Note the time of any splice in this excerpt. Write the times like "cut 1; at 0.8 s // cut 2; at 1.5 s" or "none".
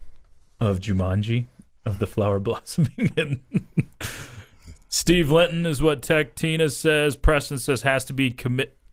none